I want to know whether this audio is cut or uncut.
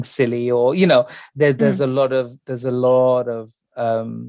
uncut